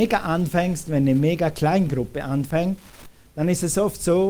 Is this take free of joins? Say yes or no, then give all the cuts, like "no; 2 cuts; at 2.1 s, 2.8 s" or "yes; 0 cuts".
yes; 0 cuts